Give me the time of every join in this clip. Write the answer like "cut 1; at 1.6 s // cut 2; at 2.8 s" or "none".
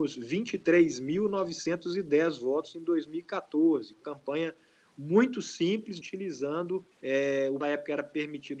cut 1; at 4.0 s // cut 2; at 6.0 s // cut 3; at 6.9 s // cut 4; at 7.6 s